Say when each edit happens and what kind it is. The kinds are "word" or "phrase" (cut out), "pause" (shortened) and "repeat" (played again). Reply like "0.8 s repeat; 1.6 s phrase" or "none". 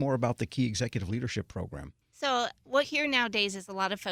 2.0 s pause; 2.8 s word

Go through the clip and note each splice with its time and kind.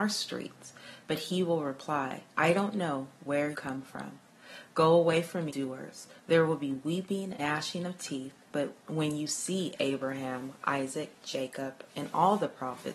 2.3 s pause; 3.5 s word; 5.5 s phrase; 6.2 s pause; 7.4 s word; 8.8 s pause

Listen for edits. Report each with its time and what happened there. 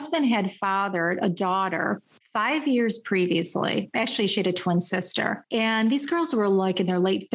none

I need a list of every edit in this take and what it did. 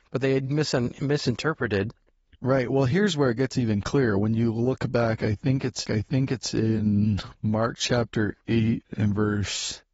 5.8 s repeat

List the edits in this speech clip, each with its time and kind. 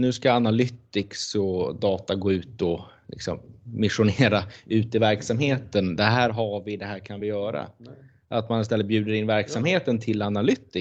none

